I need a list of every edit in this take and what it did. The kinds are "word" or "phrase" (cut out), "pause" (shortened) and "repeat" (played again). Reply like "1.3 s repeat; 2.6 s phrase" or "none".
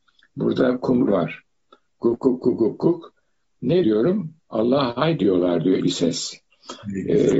1.1 s phrase; 2.2 s word; 3.8 s word; 4.4 s pause; 5.8 s word